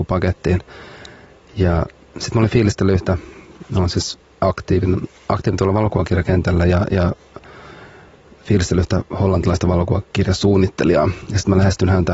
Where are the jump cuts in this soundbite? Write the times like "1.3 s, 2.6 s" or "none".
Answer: 4.2 s